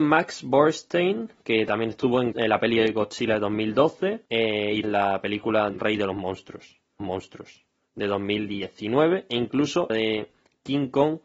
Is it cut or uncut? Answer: cut